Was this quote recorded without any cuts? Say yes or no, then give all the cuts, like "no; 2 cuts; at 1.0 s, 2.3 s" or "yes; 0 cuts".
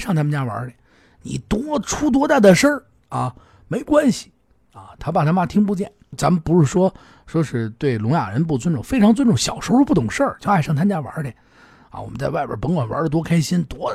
no; 1 cut; at 6.1 s